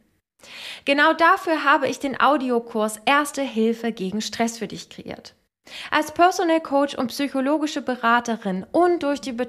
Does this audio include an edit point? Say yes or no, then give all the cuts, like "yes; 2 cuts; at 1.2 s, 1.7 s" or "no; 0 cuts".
no; 0 cuts